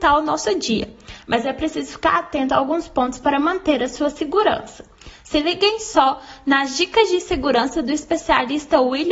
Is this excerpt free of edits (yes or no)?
yes